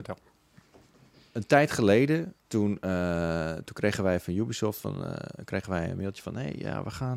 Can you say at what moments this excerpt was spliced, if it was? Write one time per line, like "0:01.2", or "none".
0:02.4